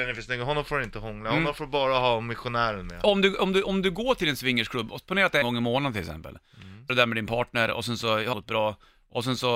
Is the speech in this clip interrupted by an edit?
yes; 3 cuts; at 5.4 s, 6.9 s, 8.3 s

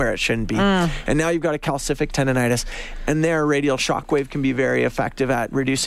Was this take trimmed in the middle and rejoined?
no; 0 cuts

